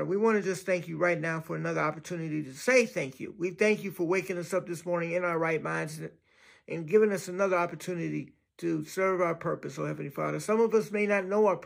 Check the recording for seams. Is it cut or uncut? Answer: uncut